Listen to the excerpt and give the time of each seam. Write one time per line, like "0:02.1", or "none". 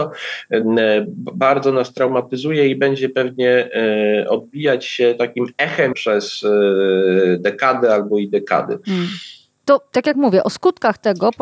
0:05.9